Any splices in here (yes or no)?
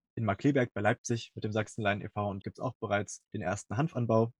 yes